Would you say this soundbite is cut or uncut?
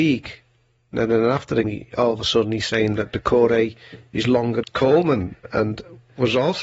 cut